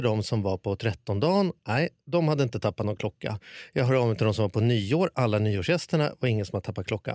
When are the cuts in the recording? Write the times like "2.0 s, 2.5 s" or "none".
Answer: none